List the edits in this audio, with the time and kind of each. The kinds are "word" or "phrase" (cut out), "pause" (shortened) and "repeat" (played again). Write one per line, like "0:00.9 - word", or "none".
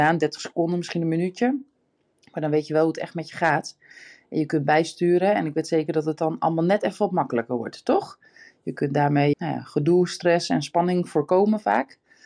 0:09.3 - word